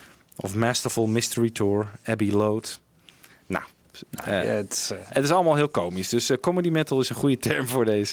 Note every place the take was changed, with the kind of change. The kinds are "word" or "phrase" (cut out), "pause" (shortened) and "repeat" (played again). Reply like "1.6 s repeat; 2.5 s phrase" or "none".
none